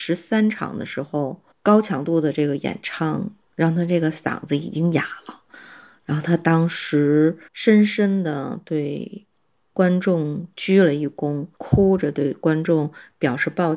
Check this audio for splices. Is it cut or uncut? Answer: cut